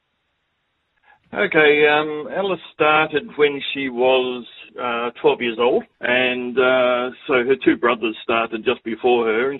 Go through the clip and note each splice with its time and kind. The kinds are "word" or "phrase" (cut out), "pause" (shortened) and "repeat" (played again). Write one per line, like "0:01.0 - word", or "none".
0:04.7 - pause
0:05.9 - pause